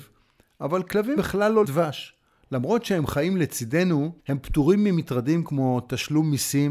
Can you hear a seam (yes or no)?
yes